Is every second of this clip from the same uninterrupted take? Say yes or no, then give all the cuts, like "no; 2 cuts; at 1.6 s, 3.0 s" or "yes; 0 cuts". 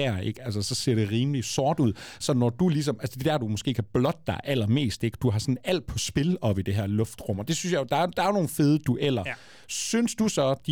yes; 0 cuts